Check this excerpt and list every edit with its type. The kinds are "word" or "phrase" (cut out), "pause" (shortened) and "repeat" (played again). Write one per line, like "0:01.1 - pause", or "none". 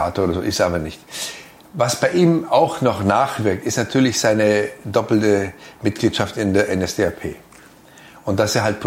none